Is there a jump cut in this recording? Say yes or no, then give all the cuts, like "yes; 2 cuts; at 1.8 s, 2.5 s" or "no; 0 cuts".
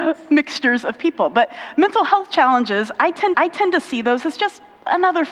yes; 1 cut; at 3.3 s